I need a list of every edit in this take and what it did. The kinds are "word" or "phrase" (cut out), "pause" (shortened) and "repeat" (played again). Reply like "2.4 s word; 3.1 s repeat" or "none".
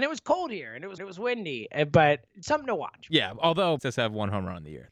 1.0 s repeat; 2.4 s word; 3.8 s word